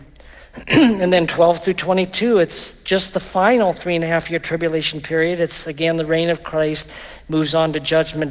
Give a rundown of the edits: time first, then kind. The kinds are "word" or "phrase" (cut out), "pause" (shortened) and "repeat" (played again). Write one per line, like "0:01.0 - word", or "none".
none